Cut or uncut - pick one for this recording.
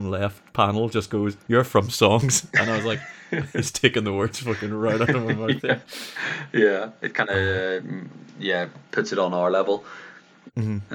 cut